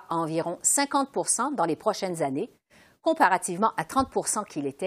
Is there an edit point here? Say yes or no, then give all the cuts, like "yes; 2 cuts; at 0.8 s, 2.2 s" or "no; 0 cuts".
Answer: no; 0 cuts